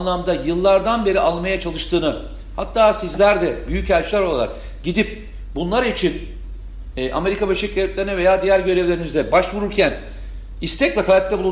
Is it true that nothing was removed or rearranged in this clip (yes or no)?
yes